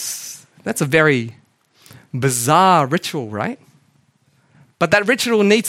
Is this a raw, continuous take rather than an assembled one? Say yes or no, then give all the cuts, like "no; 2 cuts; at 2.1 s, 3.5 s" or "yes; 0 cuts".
yes; 0 cuts